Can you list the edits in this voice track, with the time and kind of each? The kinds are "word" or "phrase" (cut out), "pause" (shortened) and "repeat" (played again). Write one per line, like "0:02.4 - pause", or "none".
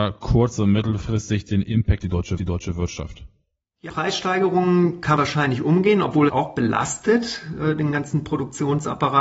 0:02.0 - word
0:02.4 - repeat
0:03.9 - word
0:05.2 - word
0:06.3 - phrase